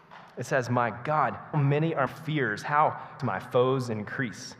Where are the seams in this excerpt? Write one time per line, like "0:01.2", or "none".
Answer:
0:01.5
0:02.1
0:03.2